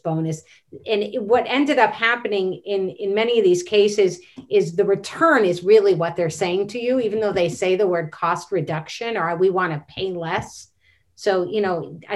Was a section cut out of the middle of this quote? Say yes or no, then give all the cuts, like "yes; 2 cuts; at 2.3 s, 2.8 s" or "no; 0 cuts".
no; 0 cuts